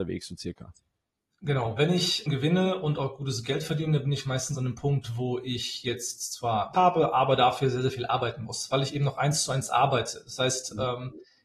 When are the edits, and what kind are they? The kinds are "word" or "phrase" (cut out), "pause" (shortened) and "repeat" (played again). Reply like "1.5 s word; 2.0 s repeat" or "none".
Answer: 2.3 s phrase; 6.7 s word